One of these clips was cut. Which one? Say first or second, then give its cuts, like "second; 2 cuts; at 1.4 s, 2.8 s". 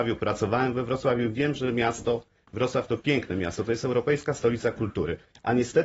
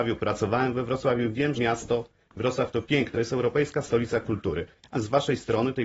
second; 3 cuts; at 1.6 s, 3.1 s, 4.9 s